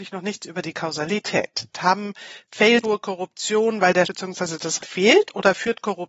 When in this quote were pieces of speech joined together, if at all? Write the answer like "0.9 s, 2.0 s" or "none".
2.8 s, 4.0 s, 4.8 s